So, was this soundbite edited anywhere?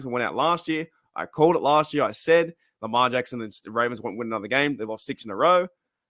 no; 0 cuts

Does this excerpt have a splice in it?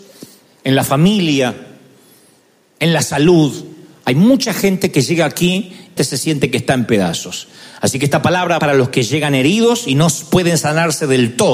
yes; 2 cuts; at 6.0 s, 8.6 s

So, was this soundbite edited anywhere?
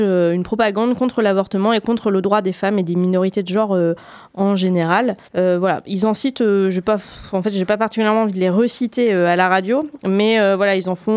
yes; 1 cut; at 5.2 s

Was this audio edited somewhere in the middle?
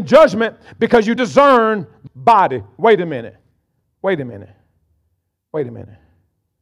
yes; 2 cuts; at 1.2 s, 2.1 s

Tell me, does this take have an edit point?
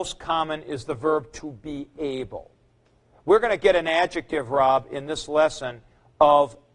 no; 0 cuts

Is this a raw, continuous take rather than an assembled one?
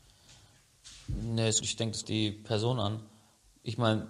no; 2 cuts; at 1.6 s, 2.0 s

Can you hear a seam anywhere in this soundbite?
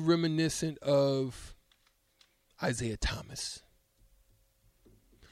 no; 0 cuts

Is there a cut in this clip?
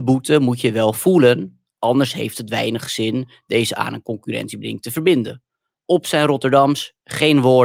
no; 0 cuts

